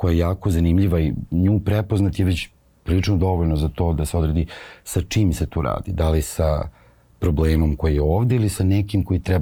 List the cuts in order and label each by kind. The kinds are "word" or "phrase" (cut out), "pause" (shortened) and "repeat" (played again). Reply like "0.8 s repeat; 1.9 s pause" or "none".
none

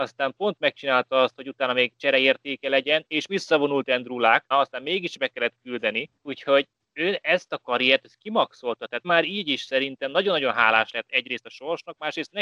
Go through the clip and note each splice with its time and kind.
3.3 s word; 4.5 s word; 6.2 s pause; 9.0 s word

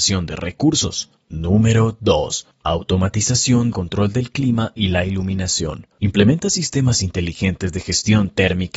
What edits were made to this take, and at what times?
1.2 s pause; 3.7 s word; 5.9 s pause

